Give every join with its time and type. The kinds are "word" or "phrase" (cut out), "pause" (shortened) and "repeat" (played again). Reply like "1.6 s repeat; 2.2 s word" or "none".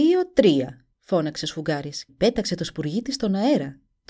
0.9 s pause; 2.1 s word